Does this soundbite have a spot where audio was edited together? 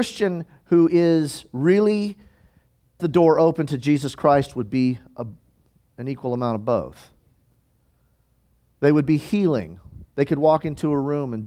yes; 1 cut; at 3.0 s

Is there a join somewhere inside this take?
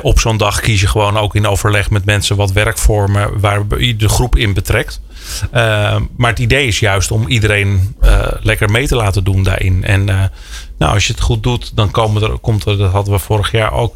no; 0 cuts

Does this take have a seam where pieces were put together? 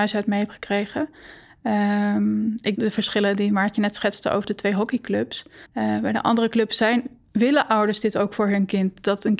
yes; 2 cuts; at 2.8 s, 5.7 s

